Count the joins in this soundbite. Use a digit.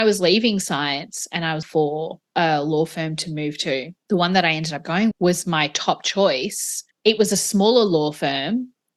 5